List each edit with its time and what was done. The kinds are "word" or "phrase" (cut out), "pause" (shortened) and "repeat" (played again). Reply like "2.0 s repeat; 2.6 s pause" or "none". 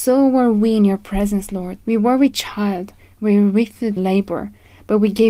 1.8 s pause; 4.0 s word